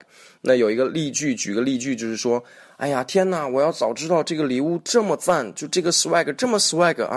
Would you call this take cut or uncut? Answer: uncut